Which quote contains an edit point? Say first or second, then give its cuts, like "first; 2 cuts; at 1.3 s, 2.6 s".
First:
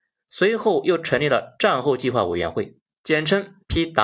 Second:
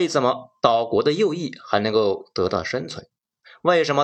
first; 1 cut; at 2.9 s